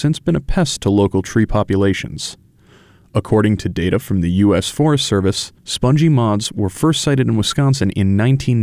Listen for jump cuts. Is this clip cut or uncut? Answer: cut